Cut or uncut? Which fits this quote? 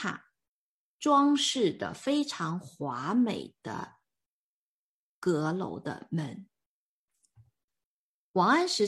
uncut